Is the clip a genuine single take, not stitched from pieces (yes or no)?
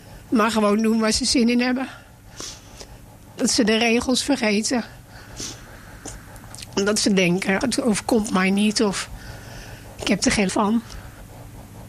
no